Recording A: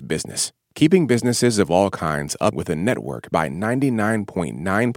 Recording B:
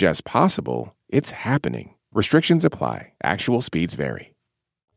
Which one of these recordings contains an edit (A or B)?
A